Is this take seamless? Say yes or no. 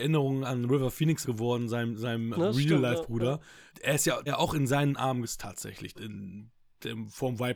no